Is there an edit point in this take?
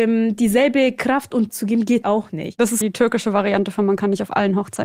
yes; 3 cuts; at 1.5 s, 2.0 s, 2.8 s

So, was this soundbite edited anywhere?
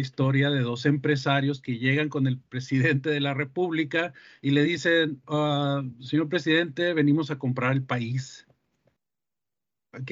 no; 0 cuts

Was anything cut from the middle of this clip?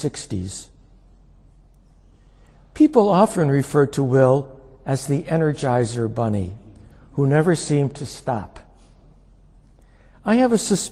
no; 0 cuts

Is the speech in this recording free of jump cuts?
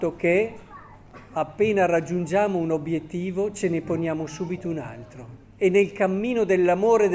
no; 1 cut; at 5.4 s

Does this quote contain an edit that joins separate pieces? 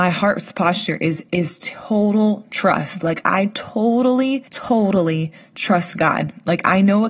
yes; 1 cut; at 4.5 s

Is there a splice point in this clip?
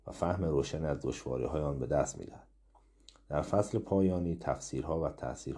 no; 0 cuts

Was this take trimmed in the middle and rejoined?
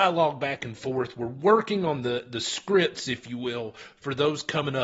no; 0 cuts

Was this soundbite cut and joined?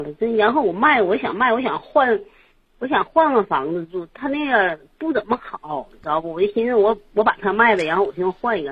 no; 0 cuts

